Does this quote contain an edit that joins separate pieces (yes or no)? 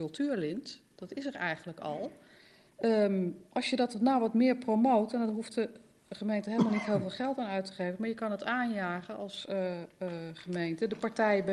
no